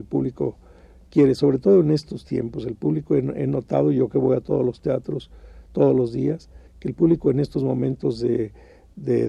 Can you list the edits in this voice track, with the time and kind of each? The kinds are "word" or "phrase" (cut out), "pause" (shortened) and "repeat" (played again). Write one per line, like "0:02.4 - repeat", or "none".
0:06.7 - pause

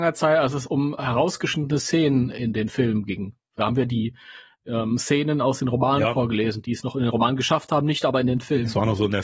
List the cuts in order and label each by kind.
0:04.7 - word

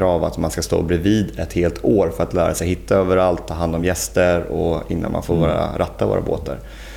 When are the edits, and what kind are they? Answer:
none

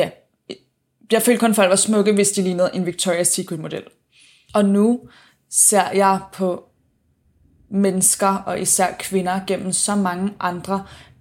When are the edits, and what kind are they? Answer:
none

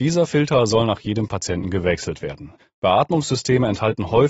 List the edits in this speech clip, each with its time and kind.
0:02.6 - pause

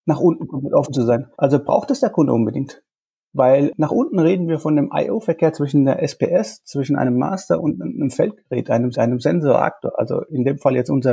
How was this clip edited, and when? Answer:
0:01.3 - pause
0:08.9 - repeat

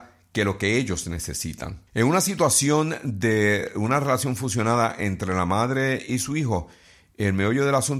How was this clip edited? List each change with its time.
0:01.9 - pause

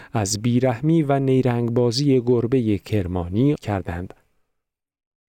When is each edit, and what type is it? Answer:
0:03.6 - word

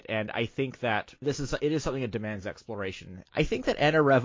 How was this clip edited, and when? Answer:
0:01.2 - pause
0:03.3 - pause

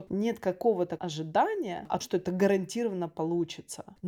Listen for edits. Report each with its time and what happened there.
0:01.0 - word
0:02.0 - word

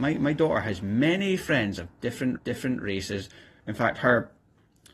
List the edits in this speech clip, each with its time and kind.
0:02.4 - repeat

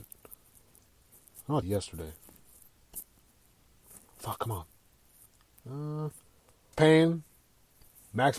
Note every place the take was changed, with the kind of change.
0:01.6 - phrase
0:06.7 - word

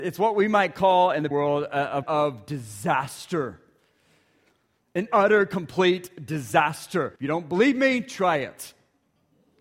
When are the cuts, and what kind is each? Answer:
0:01.3 - word
0:02.0 - word
0:05.1 - word
0:07.2 - pause

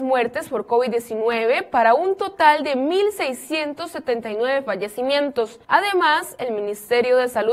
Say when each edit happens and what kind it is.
0:05.6 - pause

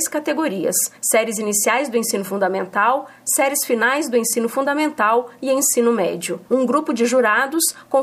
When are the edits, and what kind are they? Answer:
0:01.0 - pause
0:06.5 - pause

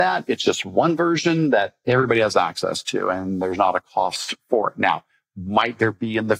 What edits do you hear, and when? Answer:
none

